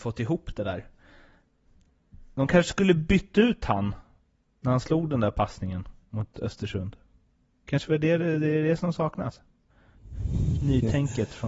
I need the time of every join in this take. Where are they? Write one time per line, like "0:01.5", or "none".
none